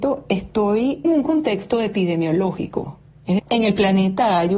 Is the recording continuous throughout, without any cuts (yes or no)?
no